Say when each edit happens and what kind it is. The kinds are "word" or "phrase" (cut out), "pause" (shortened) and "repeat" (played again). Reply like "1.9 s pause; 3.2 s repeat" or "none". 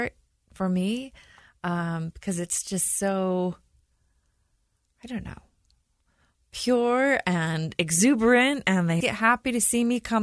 9.0 s word